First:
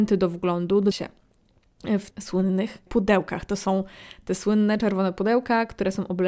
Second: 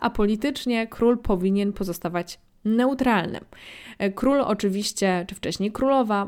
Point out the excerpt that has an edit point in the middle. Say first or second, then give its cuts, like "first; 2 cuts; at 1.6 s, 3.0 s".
first; 3 cuts; at 0.9 s, 2.1 s, 2.9 s